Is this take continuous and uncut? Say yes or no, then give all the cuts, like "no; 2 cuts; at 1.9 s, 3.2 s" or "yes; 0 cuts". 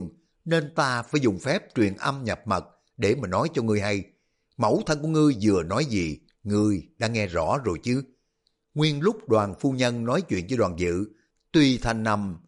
yes; 0 cuts